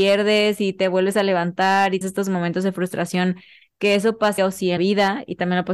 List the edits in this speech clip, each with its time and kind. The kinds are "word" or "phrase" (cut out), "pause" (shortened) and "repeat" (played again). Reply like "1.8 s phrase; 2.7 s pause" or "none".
2.0 s word; 4.4 s word; 4.8 s word